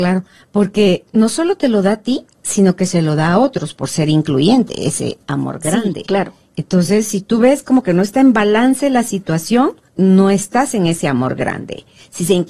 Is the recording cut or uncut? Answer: cut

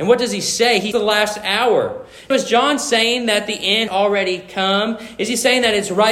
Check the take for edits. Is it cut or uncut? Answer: cut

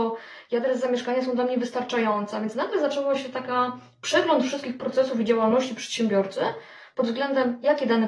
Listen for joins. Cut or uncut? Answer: uncut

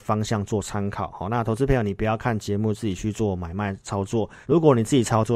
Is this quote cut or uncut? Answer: cut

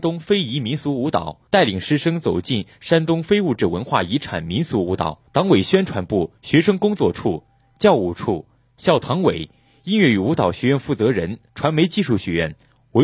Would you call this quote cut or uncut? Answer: cut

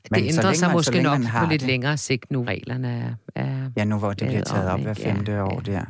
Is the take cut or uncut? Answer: cut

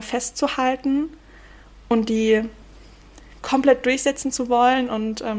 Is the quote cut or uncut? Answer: uncut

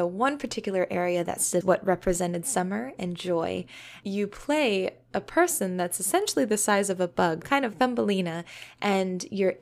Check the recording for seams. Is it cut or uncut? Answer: cut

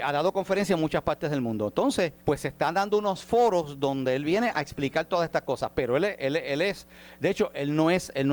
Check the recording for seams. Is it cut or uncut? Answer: cut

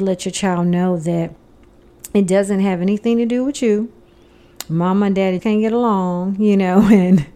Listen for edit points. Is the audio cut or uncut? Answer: cut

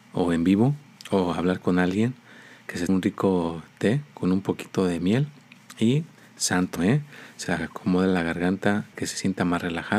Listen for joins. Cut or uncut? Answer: cut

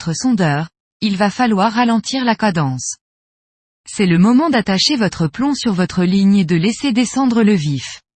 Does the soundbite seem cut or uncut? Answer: uncut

